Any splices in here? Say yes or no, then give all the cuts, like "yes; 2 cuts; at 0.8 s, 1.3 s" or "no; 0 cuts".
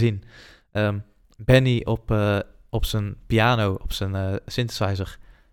no; 0 cuts